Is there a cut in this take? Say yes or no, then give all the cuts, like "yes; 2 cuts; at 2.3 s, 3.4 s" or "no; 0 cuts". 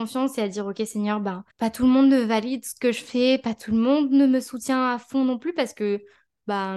yes; 1 cut; at 1.5 s